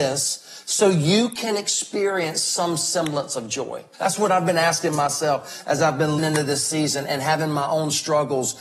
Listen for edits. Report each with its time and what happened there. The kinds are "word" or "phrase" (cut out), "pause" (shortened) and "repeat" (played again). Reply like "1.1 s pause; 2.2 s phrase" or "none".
3.9 s pause; 6.2 s word